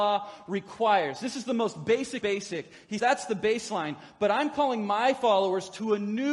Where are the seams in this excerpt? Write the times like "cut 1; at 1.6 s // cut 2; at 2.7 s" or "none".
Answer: cut 1; at 2.2 s // cut 2; at 3.0 s